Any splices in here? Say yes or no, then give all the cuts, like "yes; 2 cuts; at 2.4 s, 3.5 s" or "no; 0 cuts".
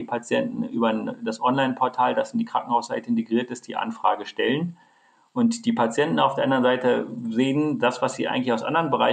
no; 0 cuts